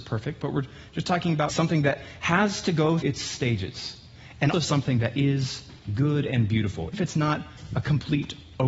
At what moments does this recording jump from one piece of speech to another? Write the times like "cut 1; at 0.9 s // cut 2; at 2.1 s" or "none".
cut 1; at 1.5 s // cut 2; at 3.0 s // cut 3; at 4.5 s // cut 4; at 6.9 s